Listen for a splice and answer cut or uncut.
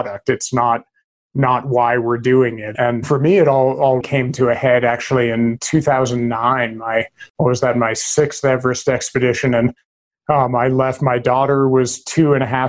cut